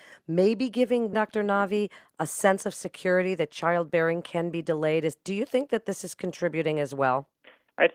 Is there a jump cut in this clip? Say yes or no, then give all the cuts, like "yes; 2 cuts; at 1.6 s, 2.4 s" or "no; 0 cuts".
yes; 1 cut; at 1.1 s